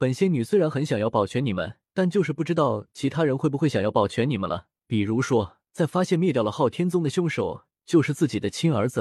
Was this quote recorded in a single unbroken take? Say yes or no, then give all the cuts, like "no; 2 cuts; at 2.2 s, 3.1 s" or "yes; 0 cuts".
no; 3 cuts; at 1.9 s, 4.8 s, 5.7 s